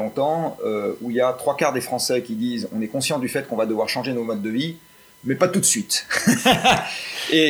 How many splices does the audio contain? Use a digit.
0